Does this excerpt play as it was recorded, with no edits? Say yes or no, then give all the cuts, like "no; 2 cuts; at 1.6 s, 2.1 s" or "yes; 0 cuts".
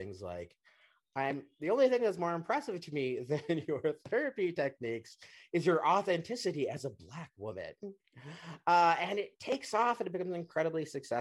yes; 0 cuts